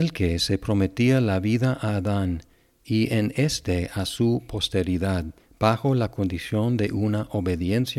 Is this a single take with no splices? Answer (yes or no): yes